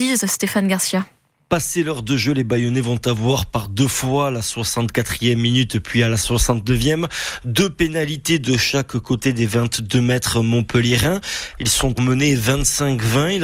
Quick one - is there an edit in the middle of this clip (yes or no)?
yes